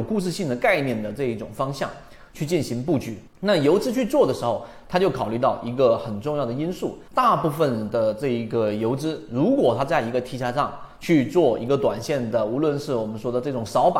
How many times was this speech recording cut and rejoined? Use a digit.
2